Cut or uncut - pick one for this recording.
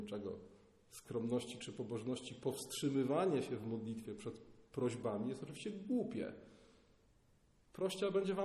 uncut